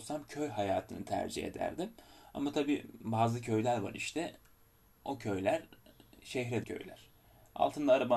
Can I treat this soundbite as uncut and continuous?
no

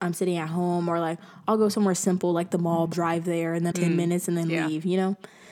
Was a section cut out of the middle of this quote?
yes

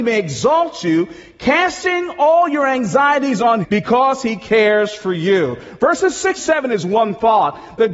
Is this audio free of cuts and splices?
no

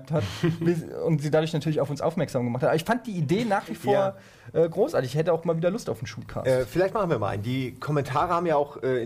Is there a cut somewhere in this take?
no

